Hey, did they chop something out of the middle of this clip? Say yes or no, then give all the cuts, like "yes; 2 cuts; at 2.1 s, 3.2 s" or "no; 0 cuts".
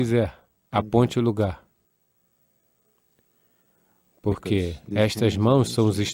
no; 0 cuts